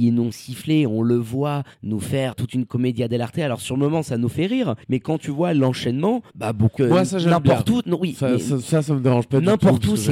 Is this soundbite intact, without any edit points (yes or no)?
no